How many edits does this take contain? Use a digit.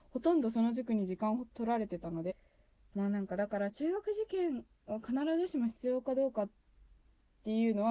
0